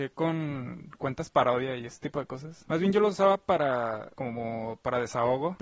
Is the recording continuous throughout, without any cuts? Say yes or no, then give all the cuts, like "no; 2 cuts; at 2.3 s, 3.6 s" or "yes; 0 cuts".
yes; 0 cuts